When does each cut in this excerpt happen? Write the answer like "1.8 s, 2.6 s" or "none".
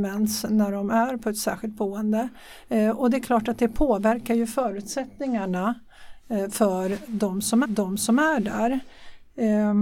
7.6 s